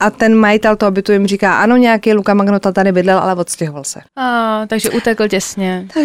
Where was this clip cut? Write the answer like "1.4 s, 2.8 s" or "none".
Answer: 4.1 s, 4.9 s